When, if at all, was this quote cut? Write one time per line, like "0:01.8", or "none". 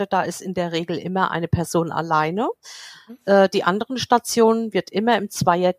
none